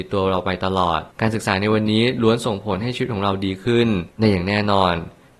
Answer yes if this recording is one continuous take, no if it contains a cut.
no